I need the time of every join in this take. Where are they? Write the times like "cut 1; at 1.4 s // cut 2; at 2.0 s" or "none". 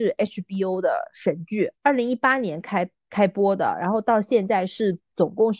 cut 1; at 1.8 s